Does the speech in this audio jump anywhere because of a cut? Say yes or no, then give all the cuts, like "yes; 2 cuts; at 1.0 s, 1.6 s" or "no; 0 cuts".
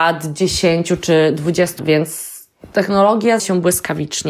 yes; 2 cuts; at 1.8 s, 3.4 s